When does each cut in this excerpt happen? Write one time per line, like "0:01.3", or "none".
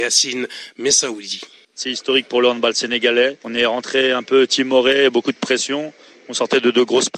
0:01.6